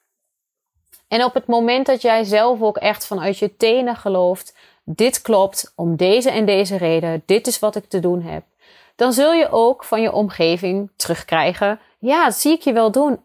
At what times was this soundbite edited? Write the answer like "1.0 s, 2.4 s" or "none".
none